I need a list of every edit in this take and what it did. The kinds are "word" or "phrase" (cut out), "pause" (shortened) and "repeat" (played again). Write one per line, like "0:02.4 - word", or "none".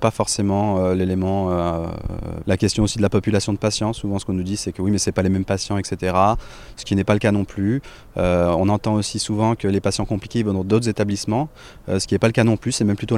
0:02.4 - word

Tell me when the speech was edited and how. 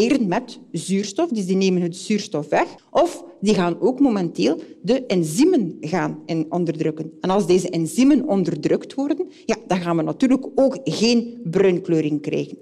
none

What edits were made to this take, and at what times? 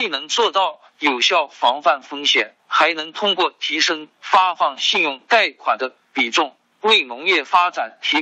0:02.6 - pause

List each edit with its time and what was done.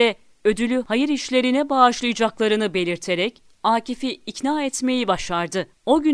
none

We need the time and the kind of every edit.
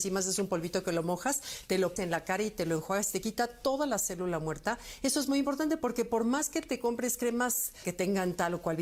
0:02.0 - word

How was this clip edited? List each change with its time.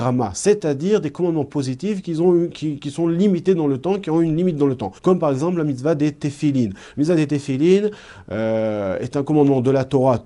0:05.0 - pause

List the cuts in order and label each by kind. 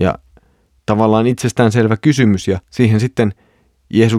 0:02.6 - pause

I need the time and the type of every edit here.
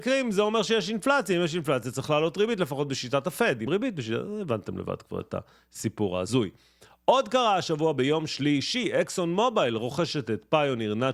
0:03.7 - word

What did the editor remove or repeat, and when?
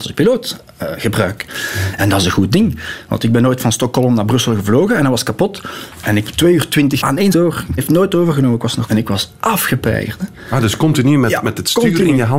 0:06.2 - word
0:07.0 - word
0:07.3 - word
0:07.8 - word
0:08.9 - word

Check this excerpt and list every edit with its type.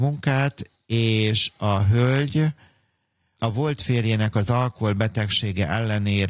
none

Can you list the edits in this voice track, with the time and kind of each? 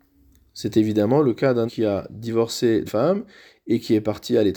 0:01.7 - word
0:02.9 - word

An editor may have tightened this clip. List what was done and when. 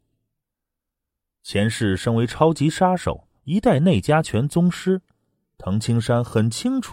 0:03.4 - pause

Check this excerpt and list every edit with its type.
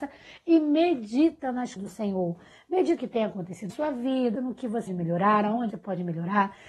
0:01.8 - word
0:03.0 - word
0:03.7 - word
0:04.3 - word
0:04.9 - word
0:05.7 - word

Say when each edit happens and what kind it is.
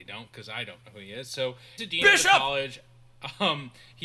0:01.8 - word

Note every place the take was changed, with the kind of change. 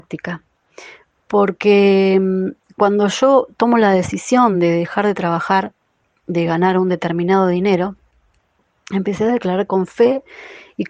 none

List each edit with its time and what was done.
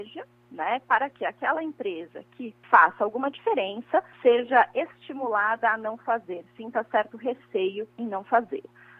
0:02.6 - pause
0:04.1 - pause
0:07.9 - pause

